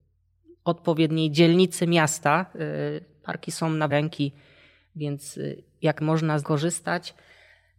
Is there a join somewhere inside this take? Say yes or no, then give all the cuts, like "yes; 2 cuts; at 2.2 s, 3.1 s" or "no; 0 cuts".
yes; 3 cuts; at 3.9 s, 6.0 s, 6.4 s